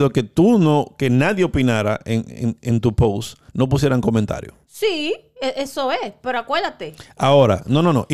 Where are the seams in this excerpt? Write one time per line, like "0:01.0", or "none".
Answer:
0:03.5
0:04.6